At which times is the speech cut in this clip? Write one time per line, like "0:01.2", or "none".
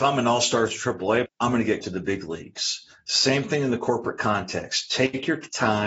0:01.3
0:01.8

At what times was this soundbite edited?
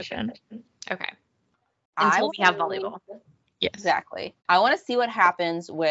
0:02.3
0:04.4

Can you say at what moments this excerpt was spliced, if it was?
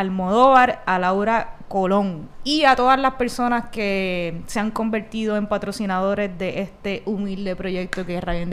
none

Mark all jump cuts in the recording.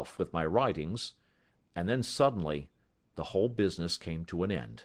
none

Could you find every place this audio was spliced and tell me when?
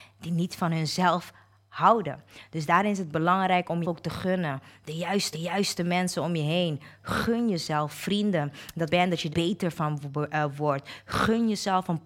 0:03.8
0:05.3
0:08.9
0:09.3

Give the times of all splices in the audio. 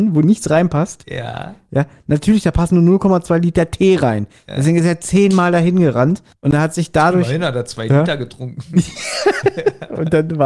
0:06.3

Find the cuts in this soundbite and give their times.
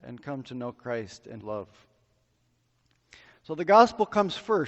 0:01.4

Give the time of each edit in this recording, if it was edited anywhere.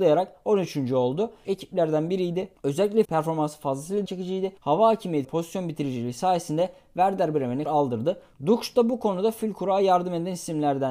0:01.4
0:03.0
0:04.1
0:04.6
0:05.2
0:07.7

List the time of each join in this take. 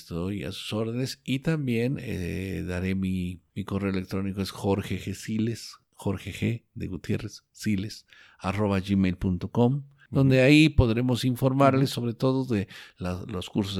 none

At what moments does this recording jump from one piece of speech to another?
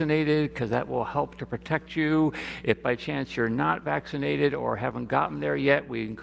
none

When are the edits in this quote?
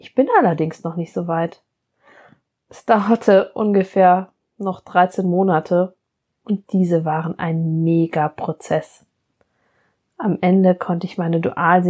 none

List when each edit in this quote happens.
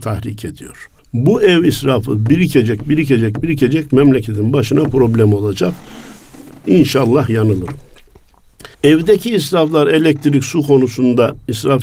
0:01.0
0:08.7

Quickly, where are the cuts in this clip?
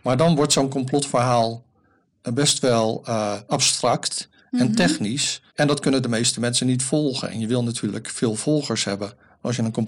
0:05.5

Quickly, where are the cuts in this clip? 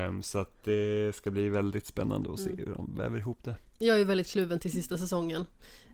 none

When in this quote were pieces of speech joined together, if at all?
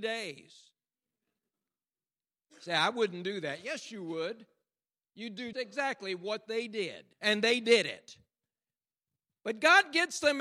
0:05.5
0:07.1

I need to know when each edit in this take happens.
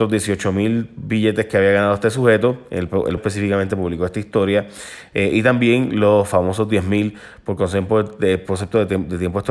0:03.2

